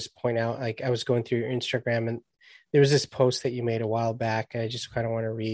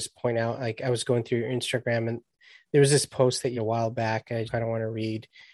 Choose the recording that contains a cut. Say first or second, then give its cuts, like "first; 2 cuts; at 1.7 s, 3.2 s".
second; 2 cuts; at 3.6 s, 4.5 s